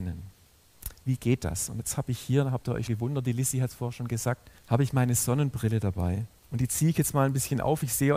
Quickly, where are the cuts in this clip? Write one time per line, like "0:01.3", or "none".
0:02.9
0:04.6
0:06.4